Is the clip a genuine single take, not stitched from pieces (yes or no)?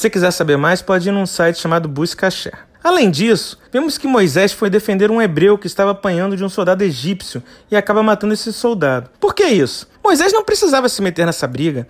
no